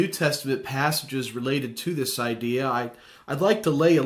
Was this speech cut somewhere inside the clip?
no; 0 cuts

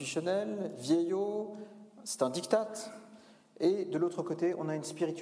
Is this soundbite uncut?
yes; 0 cuts

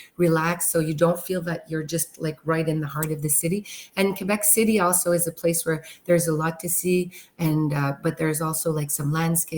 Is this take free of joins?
yes; 0 cuts

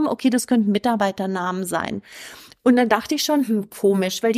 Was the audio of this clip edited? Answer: no; 0 cuts

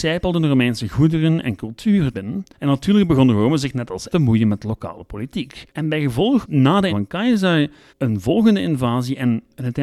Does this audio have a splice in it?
yes; 7 cuts; at 2.1 s, 2.5 s, 4.1 s, 5.7 s, 6.4 s, 6.9 s, 7.9 s

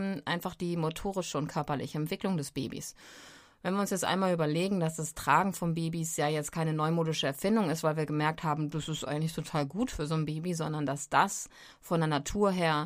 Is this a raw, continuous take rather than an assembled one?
yes; 0 cuts

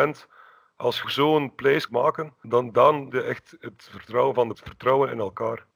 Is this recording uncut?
no; 5 cuts; at 1.0 s, 1.9 s, 2.4 s, 3.1 s, 4.5 s

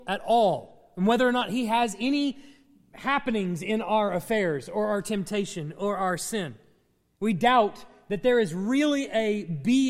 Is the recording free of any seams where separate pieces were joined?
yes; 0 cuts

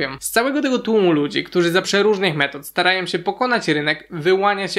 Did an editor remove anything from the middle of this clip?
yes; 1 cut; at 1.8 s

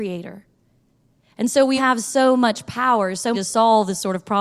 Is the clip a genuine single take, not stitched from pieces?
no; 2 cuts; at 1.8 s, 3.3 s

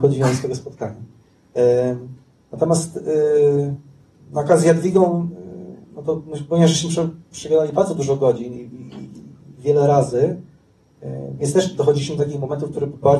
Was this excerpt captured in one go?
no; 4 cuts; at 1.2 s, 4.0 s, 5.8 s, 9.6 s

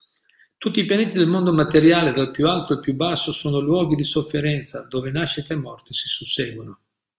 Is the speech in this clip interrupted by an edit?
no; 0 cuts

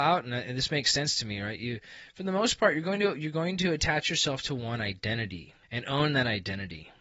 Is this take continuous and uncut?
no; 1 cut; at 5.6 s

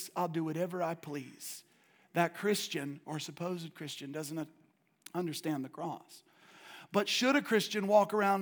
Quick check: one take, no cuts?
yes; 0 cuts

